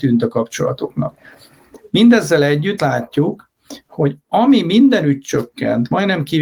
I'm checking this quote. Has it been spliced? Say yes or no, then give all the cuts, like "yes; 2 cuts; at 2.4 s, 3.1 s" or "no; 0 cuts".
yes; 1 cut; at 2.8 s